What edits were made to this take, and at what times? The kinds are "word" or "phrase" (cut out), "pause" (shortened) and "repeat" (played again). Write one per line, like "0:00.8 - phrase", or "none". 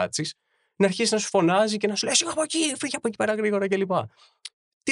none